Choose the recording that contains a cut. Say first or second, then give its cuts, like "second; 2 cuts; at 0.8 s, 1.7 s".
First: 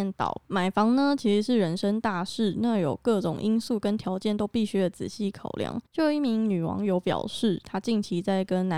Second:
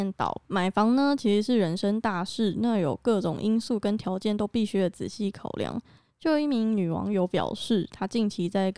first; 1 cut; at 5.8 s